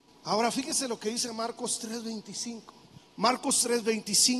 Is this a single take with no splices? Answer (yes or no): yes